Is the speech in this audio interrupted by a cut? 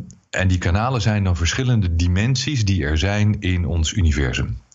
no; 0 cuts

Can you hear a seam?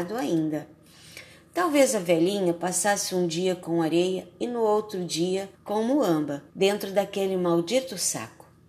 yes; 2 cuts; at 5.6 s, 6.5 s

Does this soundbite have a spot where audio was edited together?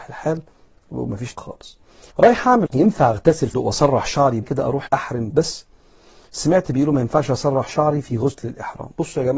yes; 7 cuts; at 1.3 s, 2.1 s, 2.7 s, 3.5 s, 4.4 s, 4.9 s, 5.3 s

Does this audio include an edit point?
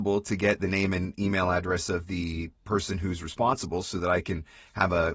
no; 0 cuts

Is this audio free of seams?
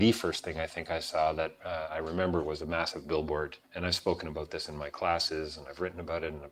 no; 1 cut; at 3.6 s

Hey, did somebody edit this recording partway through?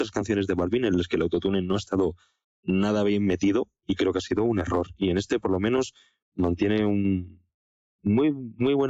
no; 0 cuts

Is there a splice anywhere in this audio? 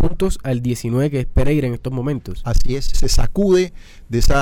yes; 1 cut; at 2.9 s

